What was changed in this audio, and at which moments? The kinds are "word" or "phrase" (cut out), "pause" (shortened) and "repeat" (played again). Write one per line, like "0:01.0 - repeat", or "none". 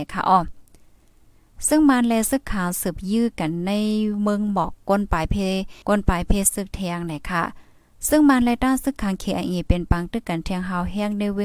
0:05.8 - pause